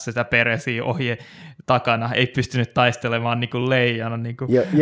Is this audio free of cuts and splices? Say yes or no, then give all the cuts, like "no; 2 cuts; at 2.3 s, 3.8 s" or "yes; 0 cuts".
yes; 0 cuts